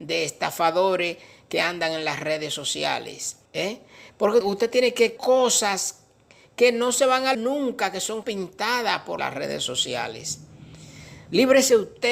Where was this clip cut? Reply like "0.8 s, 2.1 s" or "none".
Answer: 3.5 s, 4.4 s, 5.2 s, 7.3 s, 8.2 s, 9.2 s